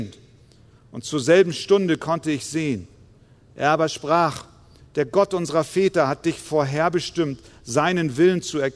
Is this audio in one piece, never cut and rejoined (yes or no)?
yes